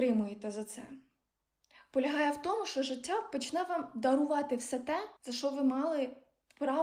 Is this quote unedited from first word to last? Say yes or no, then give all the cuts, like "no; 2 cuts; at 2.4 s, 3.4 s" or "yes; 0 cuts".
no; 1 cut; at 5.2 s